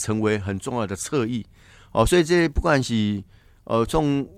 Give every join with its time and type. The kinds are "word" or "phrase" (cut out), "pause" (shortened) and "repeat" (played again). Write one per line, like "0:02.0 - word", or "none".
none